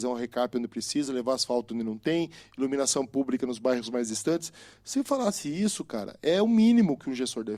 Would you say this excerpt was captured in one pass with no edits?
yes; 0 cuts

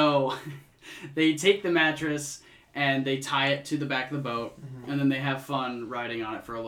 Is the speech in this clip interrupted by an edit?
no; 0 cuts

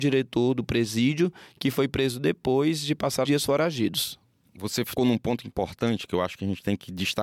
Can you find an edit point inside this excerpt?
yes; 2 cuts; at 3.3 s, 5.0 s

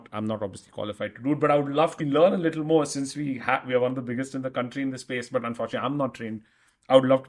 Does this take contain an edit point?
yes; 1 cut; at 2.0 s

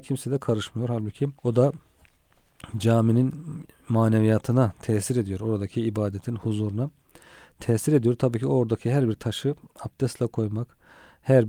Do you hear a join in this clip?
yes; 1 cut; at 1.4 s

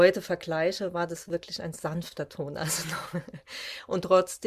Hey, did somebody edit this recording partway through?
no; 0 cuts

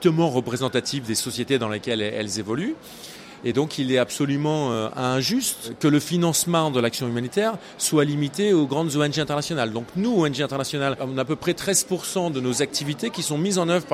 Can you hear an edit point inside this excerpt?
no; 0 cuts

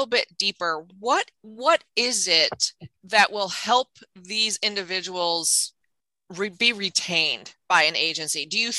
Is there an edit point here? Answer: yes; 2 cuts; at 1.3 s, 2.9 s

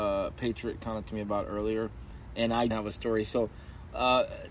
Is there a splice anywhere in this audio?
yes; 2 cuts; at 1.0 s, 2.7 s

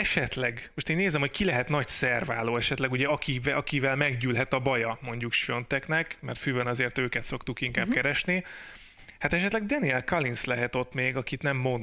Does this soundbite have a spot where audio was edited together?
no; 0 cuts

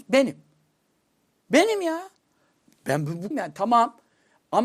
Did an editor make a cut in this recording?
yes; 1 cut; at 3.3 s

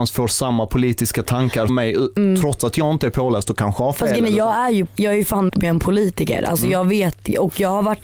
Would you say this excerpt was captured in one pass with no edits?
no; 3 cuts; at 1.7 s, 4.9 s, 5.5 s

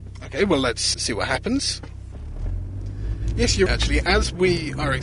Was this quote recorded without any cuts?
no; 2 cuts; at 0.9 s, 3.7 s

